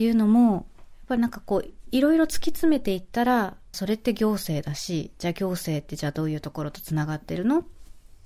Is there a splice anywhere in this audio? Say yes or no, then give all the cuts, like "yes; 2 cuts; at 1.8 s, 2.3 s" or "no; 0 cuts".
yes; 1 cut; at 3.7 s